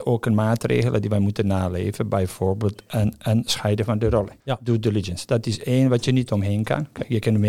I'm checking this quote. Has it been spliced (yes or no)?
yes